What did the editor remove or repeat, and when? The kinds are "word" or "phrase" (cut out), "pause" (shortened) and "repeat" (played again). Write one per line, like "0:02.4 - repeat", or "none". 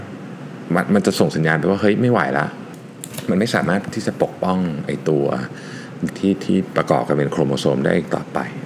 0:06.1 - word